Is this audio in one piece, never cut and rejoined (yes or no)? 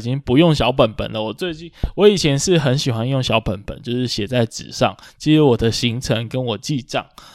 yes